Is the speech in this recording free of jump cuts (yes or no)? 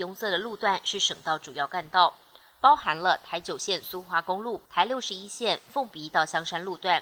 no